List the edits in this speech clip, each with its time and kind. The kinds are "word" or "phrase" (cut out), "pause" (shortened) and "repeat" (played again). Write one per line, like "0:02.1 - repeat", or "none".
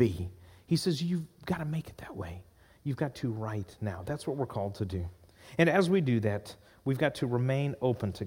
none